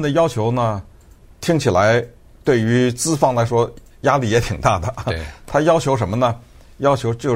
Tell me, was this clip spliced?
no; 0 cuts

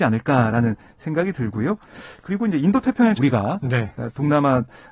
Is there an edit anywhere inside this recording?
yes; 1 cut; at 3.2 s

